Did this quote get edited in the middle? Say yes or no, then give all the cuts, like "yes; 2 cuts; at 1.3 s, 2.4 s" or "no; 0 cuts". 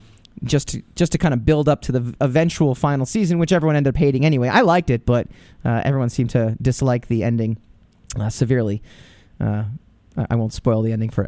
no; 0 cuts